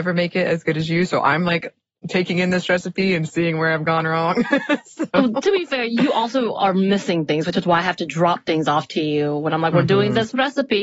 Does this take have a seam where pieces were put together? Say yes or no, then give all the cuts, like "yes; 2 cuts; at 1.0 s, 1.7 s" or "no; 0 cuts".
no; 0 cuts